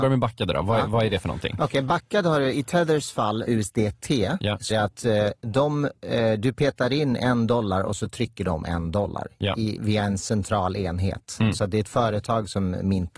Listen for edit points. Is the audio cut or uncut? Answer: cut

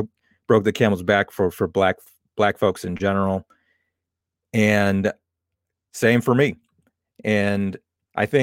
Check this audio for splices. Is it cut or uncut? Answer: uncut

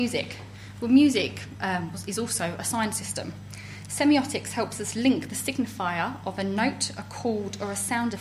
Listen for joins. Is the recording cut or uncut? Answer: uncut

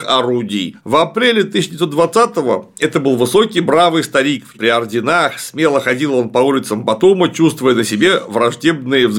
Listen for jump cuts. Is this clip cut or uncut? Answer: cut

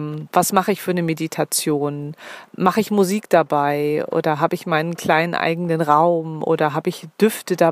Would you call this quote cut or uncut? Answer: cut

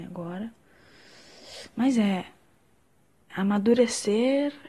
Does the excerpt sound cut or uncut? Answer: cut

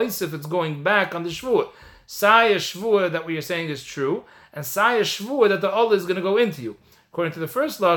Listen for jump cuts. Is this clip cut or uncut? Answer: uncut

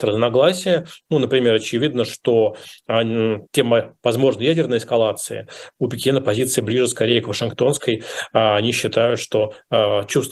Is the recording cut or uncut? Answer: cut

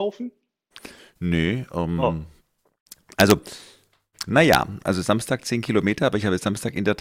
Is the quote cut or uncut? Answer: uncut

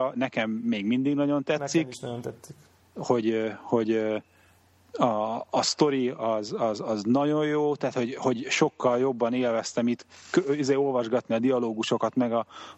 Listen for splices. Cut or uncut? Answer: uncut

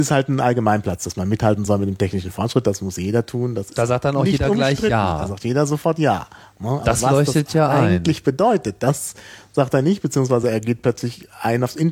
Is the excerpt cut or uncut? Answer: uncut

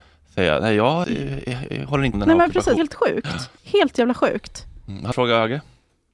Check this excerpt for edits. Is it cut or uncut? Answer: cut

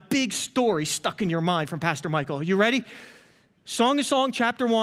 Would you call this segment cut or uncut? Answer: uncut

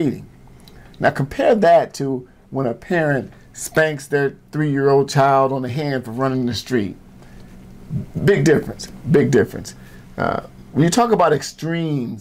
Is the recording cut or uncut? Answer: uncut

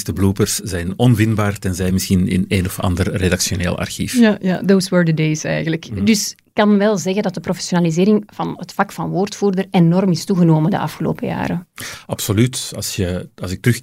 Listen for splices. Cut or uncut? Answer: uncut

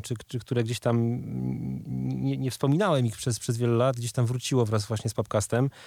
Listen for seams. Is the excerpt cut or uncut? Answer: uncut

